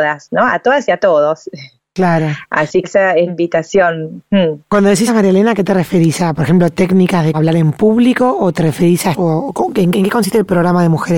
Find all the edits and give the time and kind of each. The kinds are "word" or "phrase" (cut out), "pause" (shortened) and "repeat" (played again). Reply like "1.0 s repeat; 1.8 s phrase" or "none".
2.8 s word; 3.3 s word; 5.1 s word; 7.3 s word; 9.1 s word; 9.9 s word